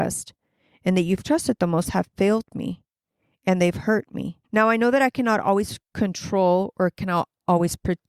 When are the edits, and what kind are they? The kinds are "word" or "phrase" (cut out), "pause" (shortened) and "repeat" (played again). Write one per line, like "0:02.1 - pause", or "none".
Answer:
0:04.4 - pause
0:05.8 - pause